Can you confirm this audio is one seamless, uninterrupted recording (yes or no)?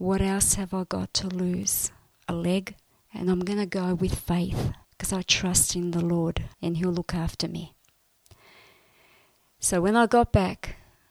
no